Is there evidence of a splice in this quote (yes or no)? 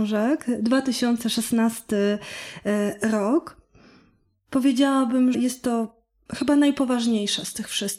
yes